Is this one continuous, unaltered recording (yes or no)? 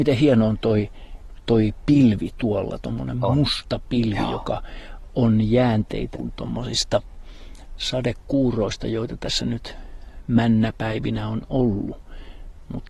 no